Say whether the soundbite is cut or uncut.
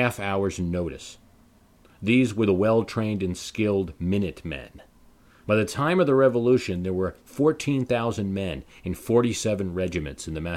uncut